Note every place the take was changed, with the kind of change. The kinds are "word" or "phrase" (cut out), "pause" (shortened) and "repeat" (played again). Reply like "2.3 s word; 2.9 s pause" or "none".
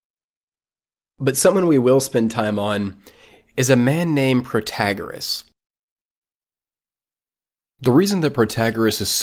none